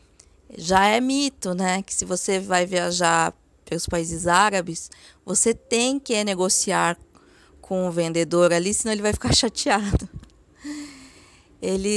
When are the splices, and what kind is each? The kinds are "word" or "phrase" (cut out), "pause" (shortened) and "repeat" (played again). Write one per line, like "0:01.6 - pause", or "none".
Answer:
none